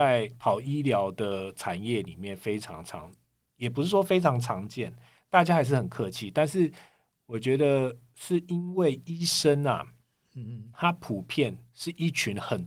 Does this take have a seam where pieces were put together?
no; 0 cuts

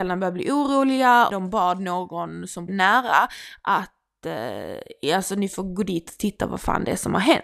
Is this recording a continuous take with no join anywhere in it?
no; 2 cuts; at 1.3 s, 2.7 s

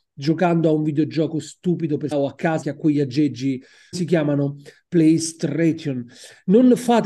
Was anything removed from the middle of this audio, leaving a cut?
yes; 3 cuts; at 2.1 s, 2.6 s, 3.9 s

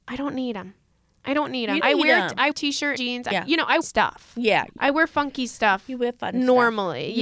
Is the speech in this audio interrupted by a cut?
yes; 5 cuts; at 1.8 s, 2.5 s, 3.0 s, 3.3 s, 3.8 s

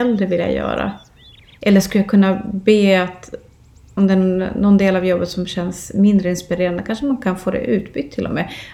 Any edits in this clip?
no; 0 cuts

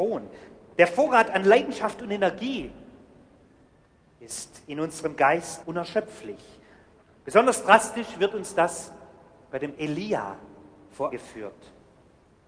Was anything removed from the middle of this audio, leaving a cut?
yes; 3 cuts; at 5.6 s, 9.8 s, 11.1 s

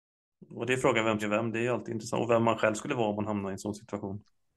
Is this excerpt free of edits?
no; 1 cut; at 1.2 s

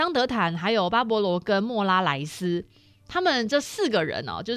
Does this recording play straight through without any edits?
yes; 0 cuts

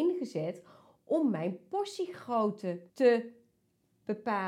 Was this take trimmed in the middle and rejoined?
yes; 1 cut; at 2.9 s

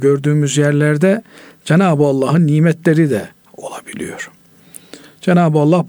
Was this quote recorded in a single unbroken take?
yes; 0 cuts

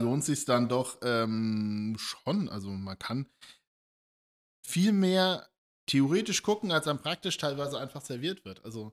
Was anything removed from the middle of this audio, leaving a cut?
no; 0 cuts

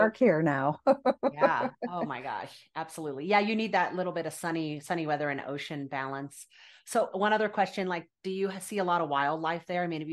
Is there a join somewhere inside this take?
no; 0 cuts

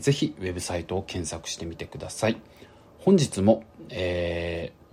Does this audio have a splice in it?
no; 0 cuts

